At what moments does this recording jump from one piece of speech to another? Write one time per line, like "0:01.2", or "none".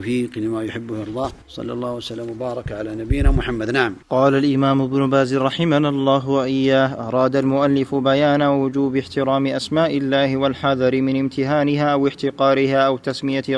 0:01.4
0:04.0